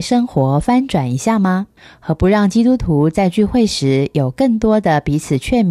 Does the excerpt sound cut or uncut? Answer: cut